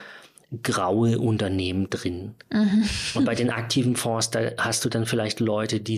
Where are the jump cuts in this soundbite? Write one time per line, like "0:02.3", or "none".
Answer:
none